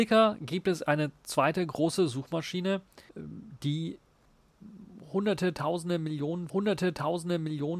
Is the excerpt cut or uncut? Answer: cut